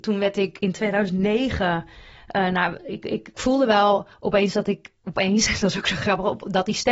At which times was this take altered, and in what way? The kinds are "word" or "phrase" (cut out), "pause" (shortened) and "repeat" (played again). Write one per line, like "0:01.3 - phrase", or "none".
none